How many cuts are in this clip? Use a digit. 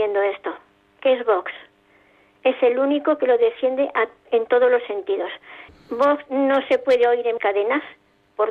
2